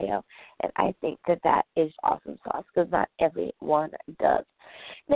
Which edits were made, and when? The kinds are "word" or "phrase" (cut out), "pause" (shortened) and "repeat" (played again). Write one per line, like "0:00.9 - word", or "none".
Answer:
0:02.0 - word